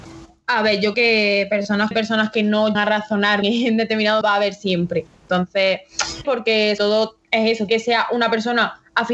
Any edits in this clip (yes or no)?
yes